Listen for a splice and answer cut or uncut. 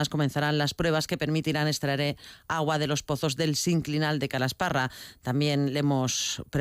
uncut